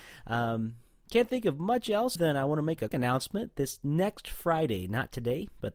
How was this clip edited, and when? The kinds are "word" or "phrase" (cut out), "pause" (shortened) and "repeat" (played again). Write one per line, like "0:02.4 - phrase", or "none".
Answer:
0:02.2 - word
0:02.9 - word